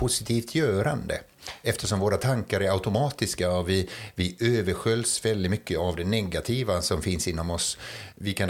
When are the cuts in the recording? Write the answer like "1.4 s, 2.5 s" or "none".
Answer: none